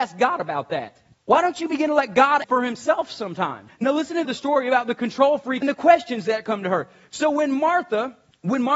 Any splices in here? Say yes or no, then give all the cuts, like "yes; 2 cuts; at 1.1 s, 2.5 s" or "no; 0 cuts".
yes; 3 cuts; at 2.4 s, 4.2 s, 5.6 s